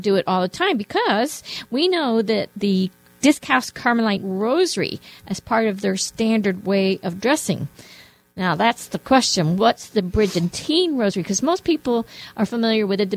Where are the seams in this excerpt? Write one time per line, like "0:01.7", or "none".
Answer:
0:04.2